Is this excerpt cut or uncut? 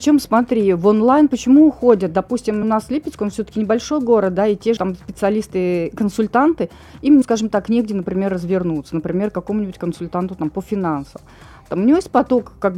cut